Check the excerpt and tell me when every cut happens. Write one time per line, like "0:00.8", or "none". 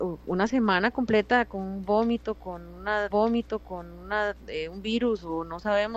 0:03.1